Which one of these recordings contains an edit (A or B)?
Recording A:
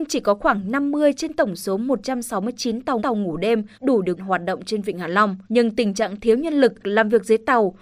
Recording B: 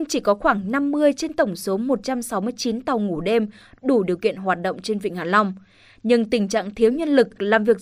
A